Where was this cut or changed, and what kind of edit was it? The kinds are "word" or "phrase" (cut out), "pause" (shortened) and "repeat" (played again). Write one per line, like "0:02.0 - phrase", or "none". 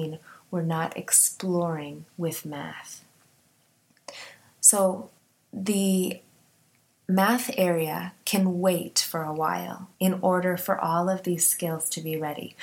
0:02.1 - pause
0:05.2 - pause
0:09.9 - pause

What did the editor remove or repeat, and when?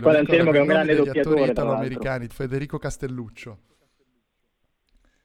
0:02.3 - word

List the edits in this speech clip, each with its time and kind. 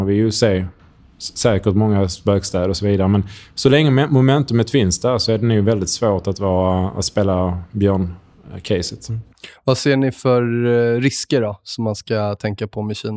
none

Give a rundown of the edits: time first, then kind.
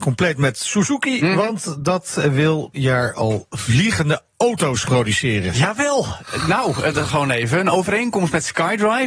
0:02.7 - word
0:04.8 - word
0:07.1 - word

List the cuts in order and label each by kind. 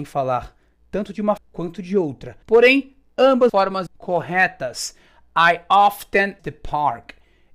0:01.4 - word
0:02.4 - pause
0:03.5 - word
0:03.9 - word
0:06.4 - phrase

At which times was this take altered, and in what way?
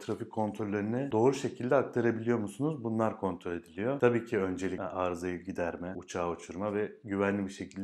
none

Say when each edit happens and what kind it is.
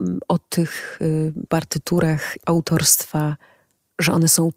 0:01.5 - word
0:02.4 - word

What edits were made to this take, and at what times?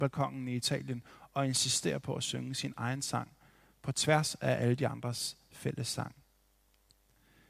none

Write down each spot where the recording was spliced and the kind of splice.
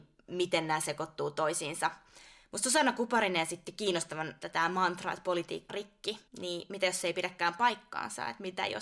0:04.4 - phrase
0:05.7 - word
0:06.3 - pause

